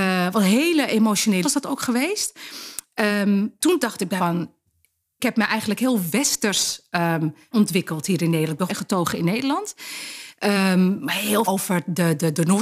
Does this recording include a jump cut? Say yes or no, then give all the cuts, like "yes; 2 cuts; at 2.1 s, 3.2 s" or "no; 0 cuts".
yes; 7 cuts; at 1.4 s, 3.6 s, 4.2 s, 5.2 s, 7.5 s, 8.7 s, 11.4 s